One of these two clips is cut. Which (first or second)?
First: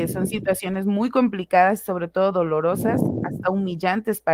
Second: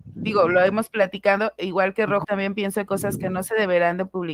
second